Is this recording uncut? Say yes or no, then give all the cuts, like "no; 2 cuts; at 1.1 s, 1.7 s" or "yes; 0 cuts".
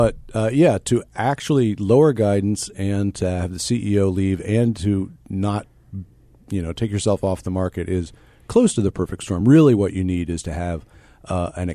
yes; 0 cuts